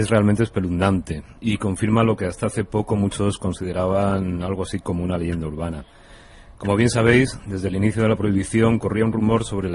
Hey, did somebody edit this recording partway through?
yes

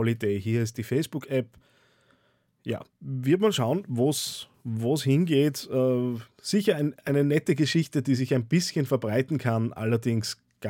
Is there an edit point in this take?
yes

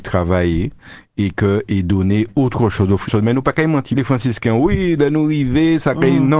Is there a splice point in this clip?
yes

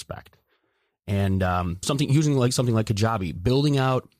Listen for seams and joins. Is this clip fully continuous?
no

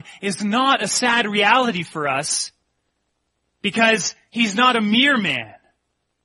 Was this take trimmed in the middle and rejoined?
no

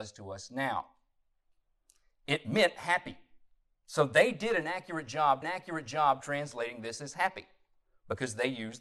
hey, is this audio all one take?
no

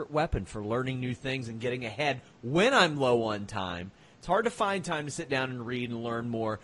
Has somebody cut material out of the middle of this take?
no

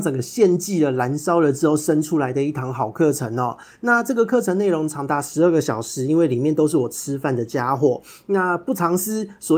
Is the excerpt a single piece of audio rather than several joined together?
yes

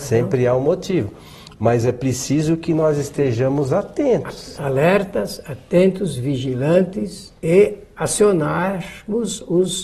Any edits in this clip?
yes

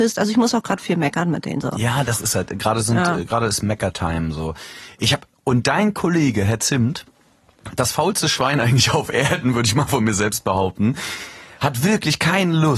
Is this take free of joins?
yes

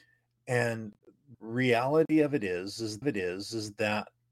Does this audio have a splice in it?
yes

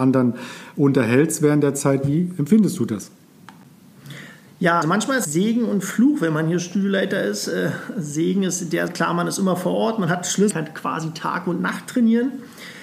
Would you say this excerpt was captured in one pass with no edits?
no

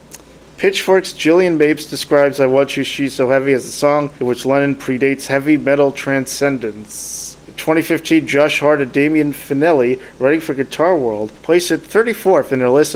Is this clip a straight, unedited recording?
no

